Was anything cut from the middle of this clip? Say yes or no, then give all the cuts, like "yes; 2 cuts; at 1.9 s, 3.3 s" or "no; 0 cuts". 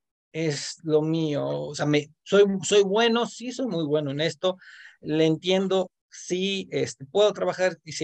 no; 0 cuts